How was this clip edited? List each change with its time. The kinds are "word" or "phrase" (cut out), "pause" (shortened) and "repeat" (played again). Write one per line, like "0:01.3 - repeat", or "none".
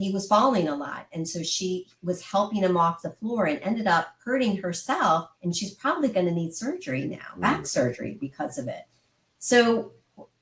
0:04.2 - pause
0:05.3 - pause